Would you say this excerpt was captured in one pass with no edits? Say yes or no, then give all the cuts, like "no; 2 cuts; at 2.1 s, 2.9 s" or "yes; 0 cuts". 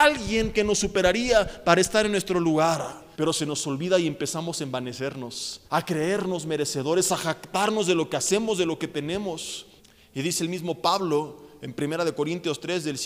no; 3 cuts; at 3.1 s, 5.7 s, 9.8 s